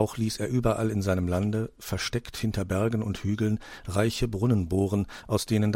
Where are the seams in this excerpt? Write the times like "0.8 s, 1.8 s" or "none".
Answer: none